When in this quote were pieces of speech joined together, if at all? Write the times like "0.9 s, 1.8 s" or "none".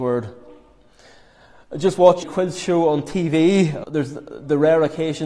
2.2 s, 3.8 s